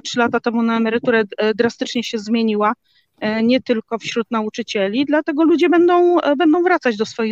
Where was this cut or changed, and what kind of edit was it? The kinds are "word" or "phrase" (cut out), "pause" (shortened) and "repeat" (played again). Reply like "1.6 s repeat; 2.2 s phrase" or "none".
none